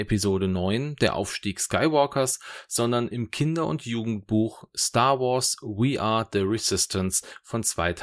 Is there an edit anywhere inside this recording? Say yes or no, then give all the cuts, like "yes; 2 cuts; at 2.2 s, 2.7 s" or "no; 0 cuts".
no; 0 cuts